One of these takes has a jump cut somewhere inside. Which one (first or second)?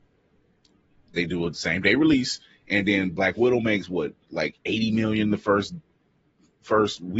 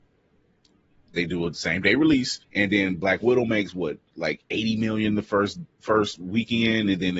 second